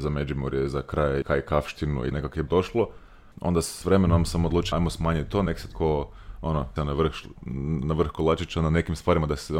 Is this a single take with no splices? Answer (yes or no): no